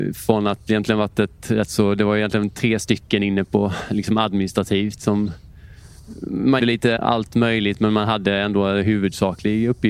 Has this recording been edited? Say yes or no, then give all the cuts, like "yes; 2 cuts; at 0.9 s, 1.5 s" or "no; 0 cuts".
yes; 2 cuts; at 6.6 s, 7.0 s